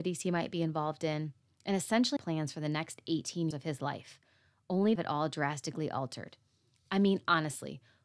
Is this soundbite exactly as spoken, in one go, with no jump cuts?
no; 3 cuts; at 2.2 s, 3.5 s, 5.0 s

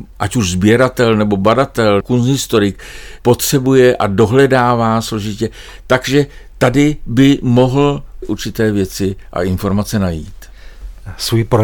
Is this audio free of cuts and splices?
no; 2 cuts; at 2.0 s, 8.2 s

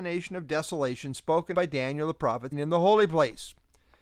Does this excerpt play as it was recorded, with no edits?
no; 2 cuts; at 1.5 s, 2.5 s

